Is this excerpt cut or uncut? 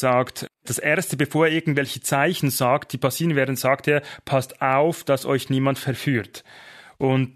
uncut